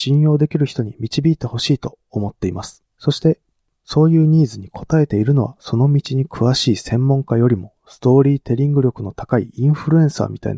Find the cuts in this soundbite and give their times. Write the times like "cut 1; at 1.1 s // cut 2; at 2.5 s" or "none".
cut 1; at 2.9 s